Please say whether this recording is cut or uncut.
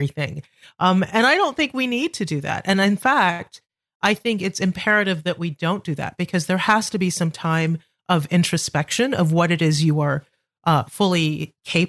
uncut